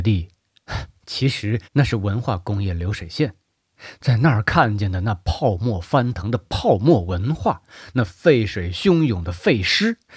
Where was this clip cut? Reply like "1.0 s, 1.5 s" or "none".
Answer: 1.7 s